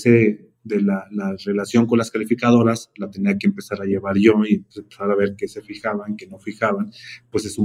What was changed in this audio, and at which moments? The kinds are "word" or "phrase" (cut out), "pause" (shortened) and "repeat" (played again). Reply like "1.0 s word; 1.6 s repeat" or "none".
none